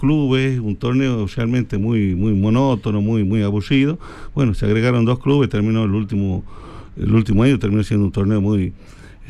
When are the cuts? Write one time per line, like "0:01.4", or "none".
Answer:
none